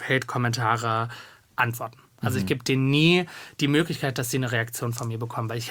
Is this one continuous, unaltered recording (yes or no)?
yes